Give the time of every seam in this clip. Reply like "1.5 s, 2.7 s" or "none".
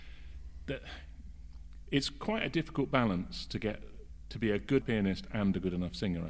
4.8 s